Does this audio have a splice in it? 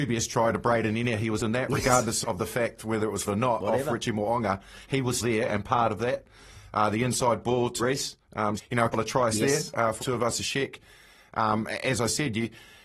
yes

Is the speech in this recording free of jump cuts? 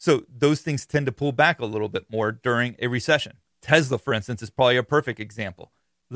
yes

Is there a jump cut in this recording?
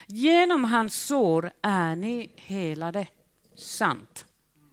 no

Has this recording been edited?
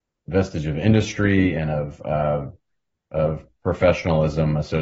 no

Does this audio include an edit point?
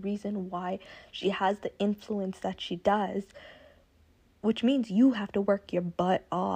no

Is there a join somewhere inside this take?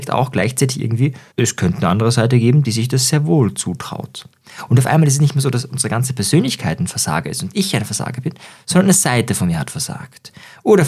yes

